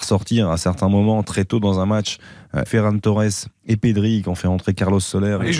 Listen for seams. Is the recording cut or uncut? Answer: cut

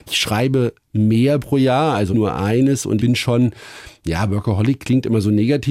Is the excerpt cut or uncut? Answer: cut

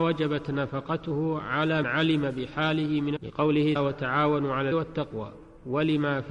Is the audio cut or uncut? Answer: cut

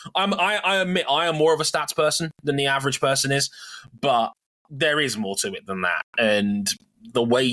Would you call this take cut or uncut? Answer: uncut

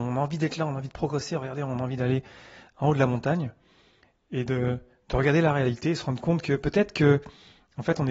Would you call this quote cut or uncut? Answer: uncut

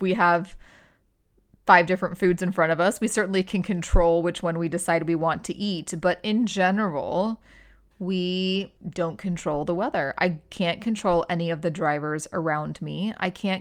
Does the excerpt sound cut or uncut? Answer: cut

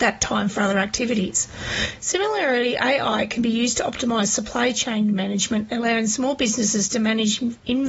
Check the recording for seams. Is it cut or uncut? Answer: uncut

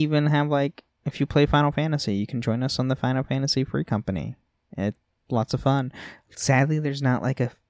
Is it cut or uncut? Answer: cut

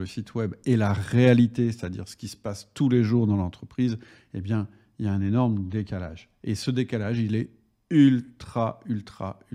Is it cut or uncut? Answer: uncut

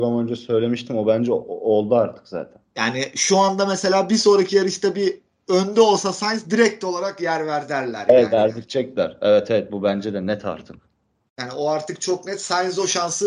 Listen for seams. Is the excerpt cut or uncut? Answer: uncut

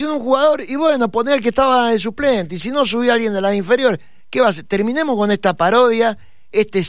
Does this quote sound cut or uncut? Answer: uncut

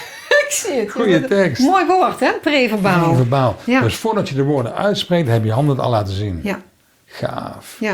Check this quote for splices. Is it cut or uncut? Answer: uncut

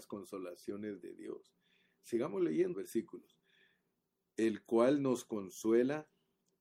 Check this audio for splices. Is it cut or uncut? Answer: cut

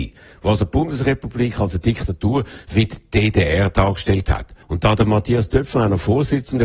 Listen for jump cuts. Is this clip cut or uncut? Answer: cut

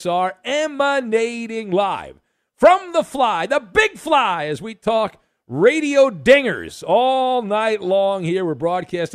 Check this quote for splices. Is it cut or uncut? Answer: uncut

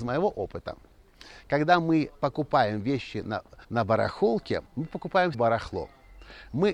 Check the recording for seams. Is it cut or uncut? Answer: cut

